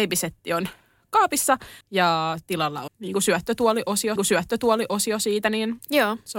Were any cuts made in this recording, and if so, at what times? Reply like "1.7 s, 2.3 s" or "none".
1.8 s, 2.9 s, 4.2 s